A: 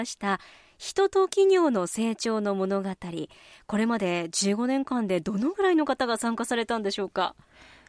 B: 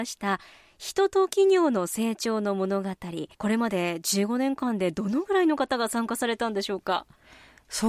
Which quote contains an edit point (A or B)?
B